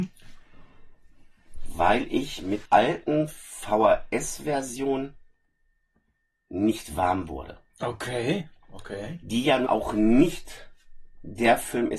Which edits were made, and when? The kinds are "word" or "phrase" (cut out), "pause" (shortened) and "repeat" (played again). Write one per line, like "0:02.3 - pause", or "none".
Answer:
0:02.7 - word
0:08.6 - pause
0:09.7 - word